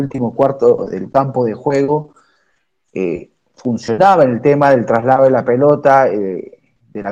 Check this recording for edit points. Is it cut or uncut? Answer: uncut